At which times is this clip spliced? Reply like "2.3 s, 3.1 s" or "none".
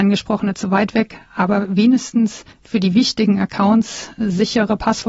2.5 s